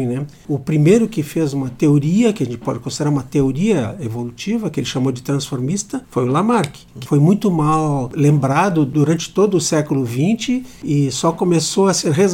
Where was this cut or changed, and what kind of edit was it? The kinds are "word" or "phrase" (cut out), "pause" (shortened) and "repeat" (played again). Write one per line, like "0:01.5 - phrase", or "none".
none